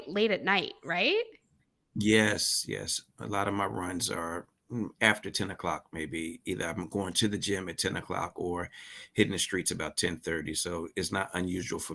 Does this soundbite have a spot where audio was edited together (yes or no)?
no